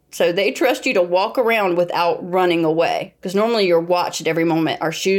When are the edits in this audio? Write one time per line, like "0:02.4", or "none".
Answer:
0:03.2